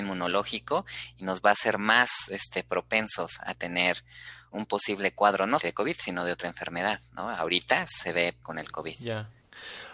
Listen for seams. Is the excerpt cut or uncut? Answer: cut